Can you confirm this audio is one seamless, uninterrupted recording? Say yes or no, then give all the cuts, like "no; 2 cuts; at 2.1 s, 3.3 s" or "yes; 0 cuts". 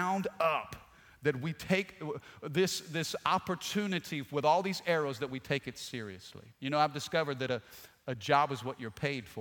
no; 1 cut; at 6.5 s